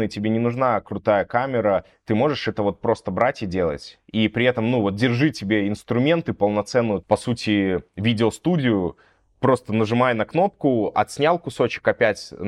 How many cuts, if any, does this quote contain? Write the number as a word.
zero